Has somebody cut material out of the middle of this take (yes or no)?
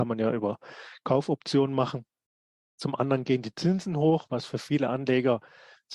no